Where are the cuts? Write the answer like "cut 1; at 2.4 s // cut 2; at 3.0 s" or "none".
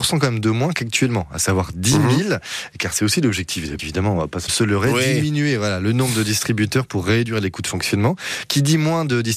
cut 1; at 3.8 s // cut 2; at 4.5 s

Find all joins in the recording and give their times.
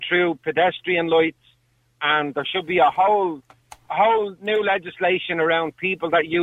none

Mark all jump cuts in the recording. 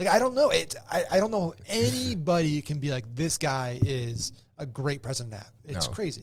none

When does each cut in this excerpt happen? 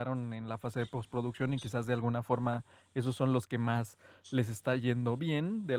none

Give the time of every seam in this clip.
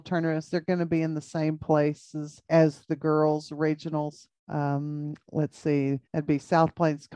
cut 1; at 2.4 s // cut 2; at 4.4 s // cut 3; at 6.0 s

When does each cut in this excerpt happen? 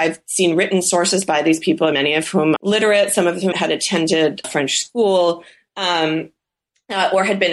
cut 1; at 1.9 s // cut 2; at 2.6 s // cut 3; at 3.5 s // cut 4; at 4.4 s

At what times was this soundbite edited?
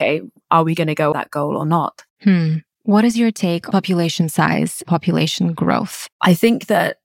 cut 1; at 1.1 s // cut 2; at 2.1 s // cut 3; at 3.7 s // cut 4; at 4.8 s // cut 5; at 6.1 s

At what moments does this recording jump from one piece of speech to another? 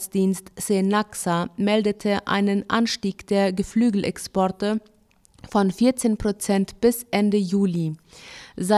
none

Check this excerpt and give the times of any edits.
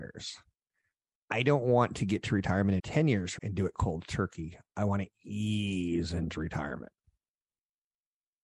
cut 1; at 2.8 s // cut 2; at 3.4 s

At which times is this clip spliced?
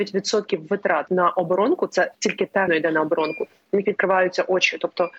cut 1; at 1.1 s // cut 2; at 2.1 s // cut 3; at 2.7 s

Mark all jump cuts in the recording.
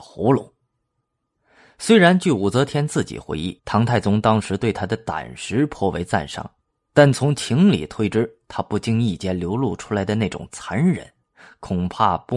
cut 1; at 3.6 s

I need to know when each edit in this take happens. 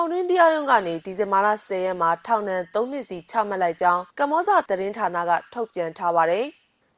cut 1; at 4.1 s // cut 2; at 4.7 s

